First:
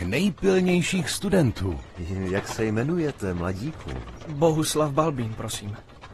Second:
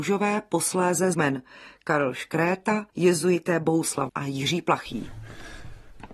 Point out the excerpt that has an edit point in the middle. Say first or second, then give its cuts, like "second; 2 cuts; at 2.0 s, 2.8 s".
second; 3 cuts; at 1.1 s, 2.9 s, 4.1 s